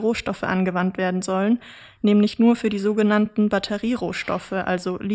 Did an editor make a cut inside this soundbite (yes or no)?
no